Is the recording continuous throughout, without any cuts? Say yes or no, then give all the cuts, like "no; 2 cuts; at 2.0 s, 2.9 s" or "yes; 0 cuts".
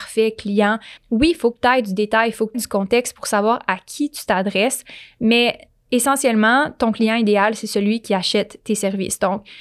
no; 2 cuts; at 1.0 s, 2.5 s